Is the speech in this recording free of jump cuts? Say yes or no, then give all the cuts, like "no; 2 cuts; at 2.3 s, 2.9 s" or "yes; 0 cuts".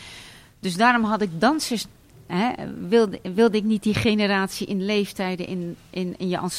yes; 0 cuts